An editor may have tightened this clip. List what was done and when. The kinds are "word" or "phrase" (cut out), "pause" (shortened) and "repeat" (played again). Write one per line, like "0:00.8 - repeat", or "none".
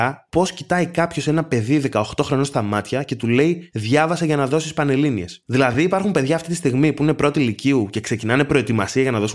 none

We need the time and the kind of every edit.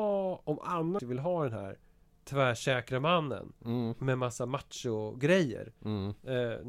0:01.0 - word

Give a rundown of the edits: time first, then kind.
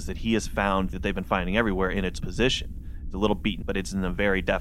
0:00.9 - word
0:02.2 - word
0:03.6 - word

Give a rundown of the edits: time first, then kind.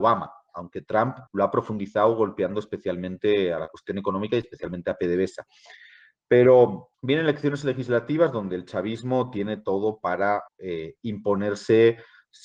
0:01.3 - pause
0:06.9 - pause
0:10.5 - pause

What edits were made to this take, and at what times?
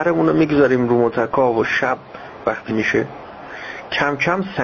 0:02.7 - phrase

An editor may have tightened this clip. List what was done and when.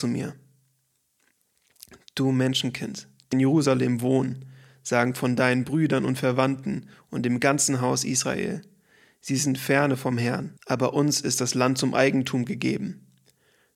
0:03.3 - phrase
0:10.6 - pause

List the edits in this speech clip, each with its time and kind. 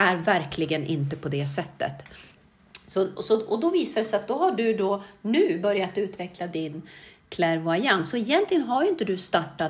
none

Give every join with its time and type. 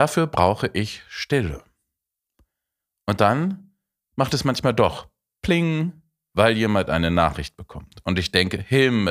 none

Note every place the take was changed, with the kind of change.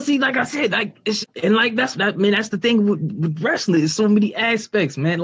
0:01.2 - word
0:01.9 - word

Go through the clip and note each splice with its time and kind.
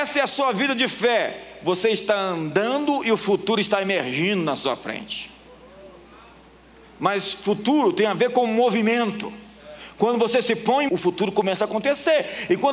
0:10.9 - word

